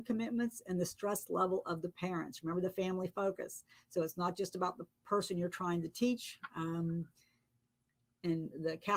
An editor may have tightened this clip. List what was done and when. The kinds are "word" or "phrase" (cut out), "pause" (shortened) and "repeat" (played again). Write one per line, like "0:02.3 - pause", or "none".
none

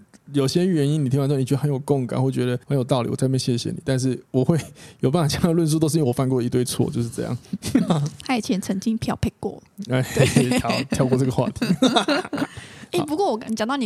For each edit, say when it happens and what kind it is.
0:02.6 - pause
0:04.2 - pause

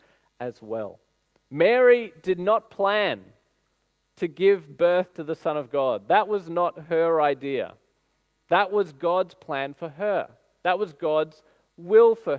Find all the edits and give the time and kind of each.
0:01.3 - pause

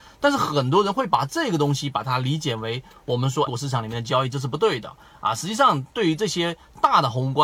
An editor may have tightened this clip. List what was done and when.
0:03.5 - word

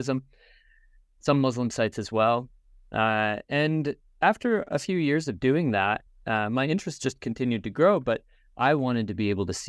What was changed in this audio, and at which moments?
none

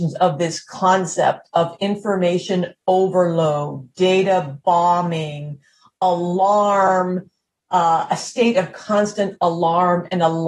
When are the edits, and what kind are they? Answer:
none

